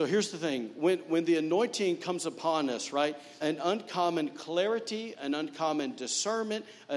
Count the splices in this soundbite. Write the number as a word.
one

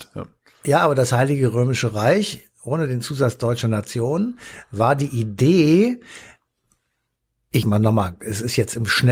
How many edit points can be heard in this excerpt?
one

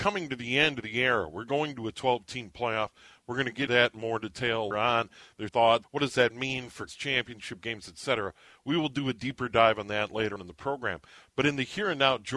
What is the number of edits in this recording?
six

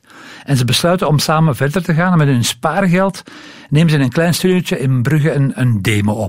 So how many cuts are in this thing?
zero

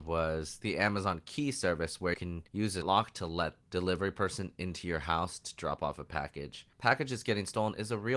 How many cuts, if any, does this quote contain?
five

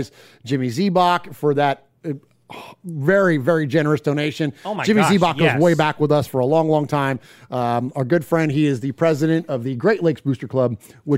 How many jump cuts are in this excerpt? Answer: zero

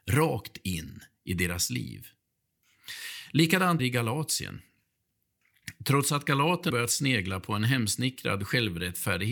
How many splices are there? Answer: two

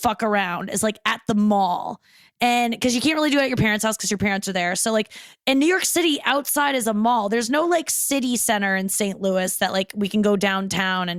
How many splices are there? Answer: zero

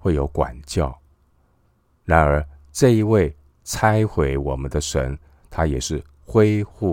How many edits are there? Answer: zero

